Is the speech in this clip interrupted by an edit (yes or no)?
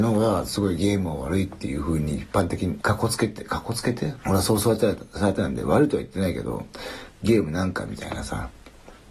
yes